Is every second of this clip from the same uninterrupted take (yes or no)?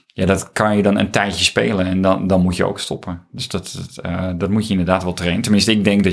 yes